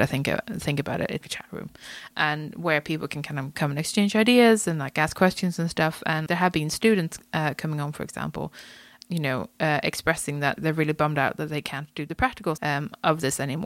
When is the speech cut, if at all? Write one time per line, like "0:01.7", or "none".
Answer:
0:01.2
0:06.3
0:10.6
0:12.6